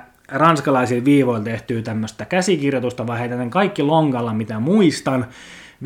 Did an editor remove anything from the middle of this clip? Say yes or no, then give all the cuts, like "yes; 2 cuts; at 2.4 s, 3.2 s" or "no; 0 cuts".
no; 0 cuts